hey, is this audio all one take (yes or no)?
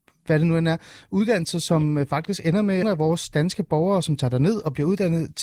no